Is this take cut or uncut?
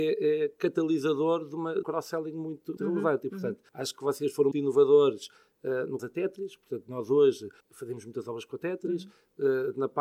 cut